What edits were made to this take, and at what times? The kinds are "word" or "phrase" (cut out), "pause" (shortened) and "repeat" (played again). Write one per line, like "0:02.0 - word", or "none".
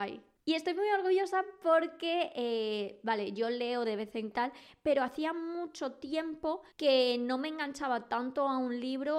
0:04.3 - phrase
0:06.7 - pause